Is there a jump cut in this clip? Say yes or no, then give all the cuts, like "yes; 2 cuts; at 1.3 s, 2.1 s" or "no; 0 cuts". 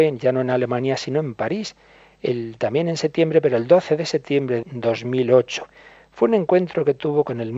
yes; 1 cut; at 4.6 s